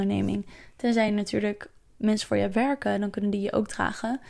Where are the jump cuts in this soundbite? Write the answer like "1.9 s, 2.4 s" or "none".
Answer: none

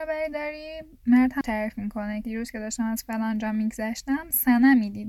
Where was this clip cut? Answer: 1.4 s, 2.2 s

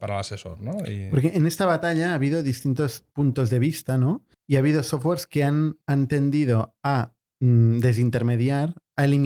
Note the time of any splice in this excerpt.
4.3 s, 5.8 s

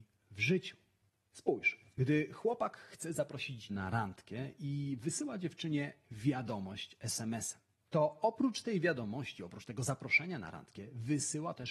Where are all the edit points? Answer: 3.7 s

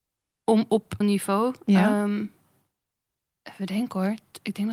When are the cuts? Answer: 1.0 s

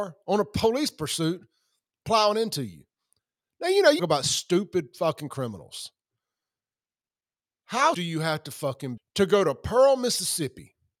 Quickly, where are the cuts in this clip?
4.0 s, 7.9 s, 9.0 s

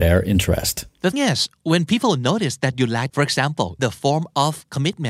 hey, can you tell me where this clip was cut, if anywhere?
1.1 s, 3.1 s, 3.8 s

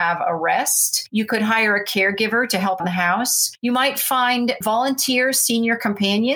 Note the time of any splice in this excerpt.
2.8 s

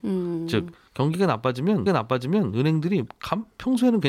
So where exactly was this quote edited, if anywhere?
1.9 s

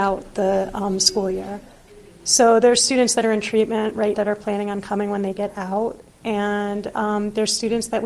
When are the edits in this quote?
4.1 s

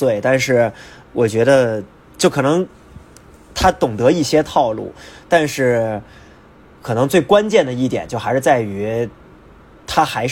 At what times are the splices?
none

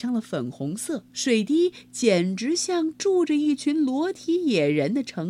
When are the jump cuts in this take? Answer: 1.1 s

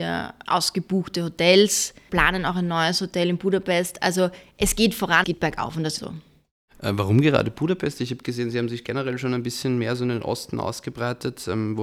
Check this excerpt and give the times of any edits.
5.2 s, 6.0 s

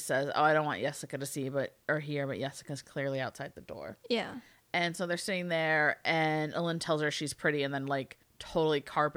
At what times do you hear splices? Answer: none

